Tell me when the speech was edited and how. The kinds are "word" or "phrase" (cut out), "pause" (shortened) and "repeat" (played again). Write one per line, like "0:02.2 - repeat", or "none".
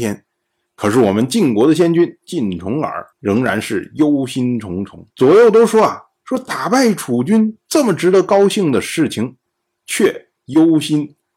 0:03.1 - pause
0:05.1 - pause
0:10.4 - pause

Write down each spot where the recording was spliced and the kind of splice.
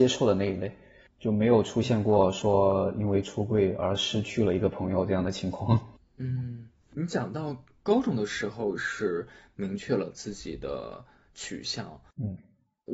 none

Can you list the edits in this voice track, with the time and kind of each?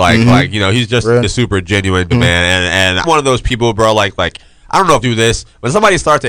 0:01.2 - word
0:02.1 - word
0:03.0 - word
0:05.0 - word

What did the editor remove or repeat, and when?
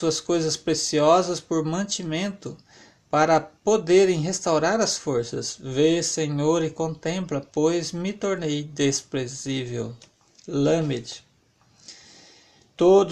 none

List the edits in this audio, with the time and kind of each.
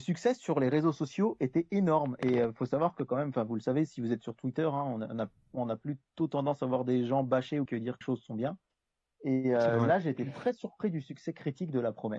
0:07.7 - word
0:08.0 - word

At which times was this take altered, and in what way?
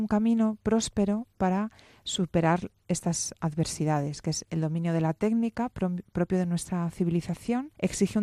none

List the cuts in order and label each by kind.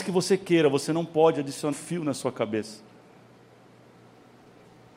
0:01.7 - word

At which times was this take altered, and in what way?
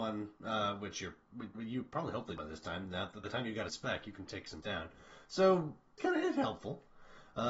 0:01.5 - word
0:02.4 - word
0:03.2 - word
0:03.7 - word
0:04.3 - word
0:04.6 - word
0:06.0 - word

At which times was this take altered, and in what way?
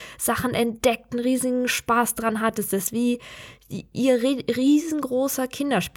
none

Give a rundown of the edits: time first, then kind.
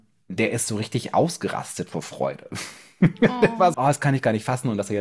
0:03.7 - word

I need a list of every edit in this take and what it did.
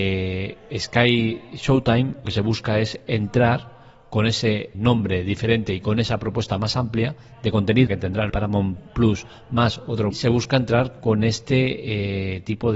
0:02.2 - word
0:04.7 - word
0:07.9 - word
0:08.3 - word
0:10.1 - phrase

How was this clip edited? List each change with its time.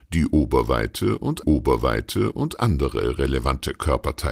0:01.4 - repeat

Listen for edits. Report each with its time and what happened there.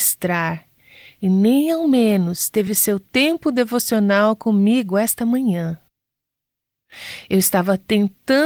none

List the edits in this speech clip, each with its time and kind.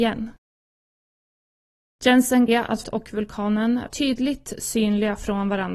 0:02.5 - phrase
0:02.8 - word
0:03.9 - word

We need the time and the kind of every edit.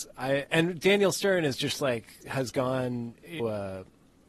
0:03.4 - phrase

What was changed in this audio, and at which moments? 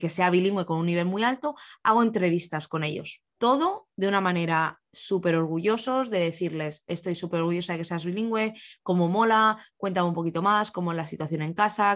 0:03.3 - pause

